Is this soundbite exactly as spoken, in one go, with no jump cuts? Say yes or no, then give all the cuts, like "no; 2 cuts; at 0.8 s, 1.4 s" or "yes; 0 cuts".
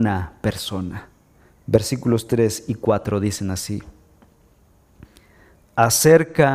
yes; 0 cuts